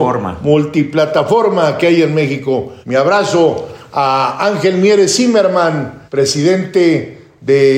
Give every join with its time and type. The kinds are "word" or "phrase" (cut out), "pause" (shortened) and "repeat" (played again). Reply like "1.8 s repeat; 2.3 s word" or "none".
2.8 s pause; 6.1 s pause

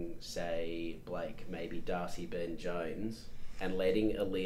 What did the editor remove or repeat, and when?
none

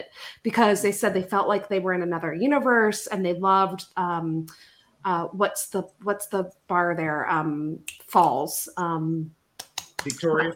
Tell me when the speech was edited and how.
none

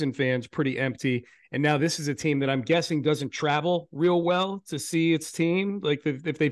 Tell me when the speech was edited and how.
none

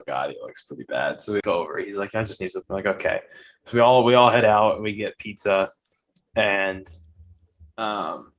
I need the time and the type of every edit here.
1.4 s word; 2.6 s word

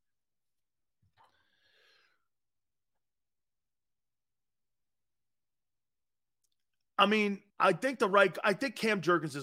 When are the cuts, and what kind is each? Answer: 7.5 s pause

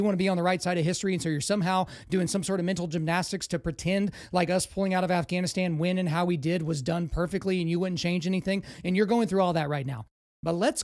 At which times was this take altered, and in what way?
none

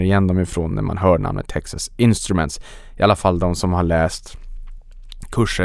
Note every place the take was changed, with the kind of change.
none

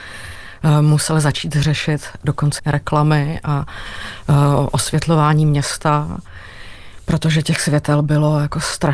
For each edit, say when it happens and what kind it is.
2.6 s phrase

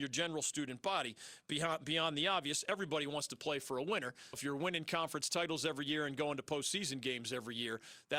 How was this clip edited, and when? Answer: 4.3 s word

